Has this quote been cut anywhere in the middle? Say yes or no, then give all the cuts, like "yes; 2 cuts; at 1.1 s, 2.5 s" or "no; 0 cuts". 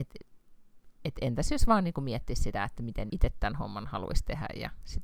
yes; 1 cut; at 3.1 s